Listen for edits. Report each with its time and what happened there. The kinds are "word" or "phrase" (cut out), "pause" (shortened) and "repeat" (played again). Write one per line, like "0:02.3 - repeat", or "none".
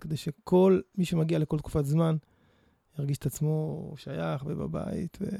none